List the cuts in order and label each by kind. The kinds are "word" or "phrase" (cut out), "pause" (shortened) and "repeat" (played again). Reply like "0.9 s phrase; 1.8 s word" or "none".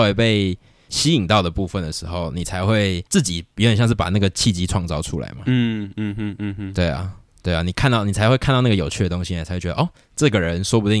none